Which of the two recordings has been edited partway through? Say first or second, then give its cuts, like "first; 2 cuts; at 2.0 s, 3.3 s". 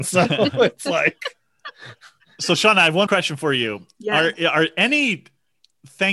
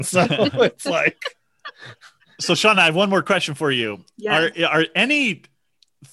first; 1 cut; at 3.1 s